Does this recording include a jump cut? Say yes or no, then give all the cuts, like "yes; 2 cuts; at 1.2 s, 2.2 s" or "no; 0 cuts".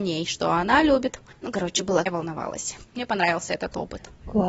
yes; 2 cuts; at 1.3 s, 2.1 s